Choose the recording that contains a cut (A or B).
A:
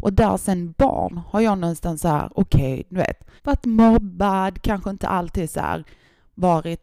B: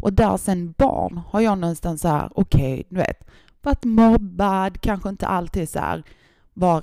A